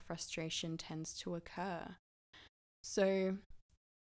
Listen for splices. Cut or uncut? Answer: uncut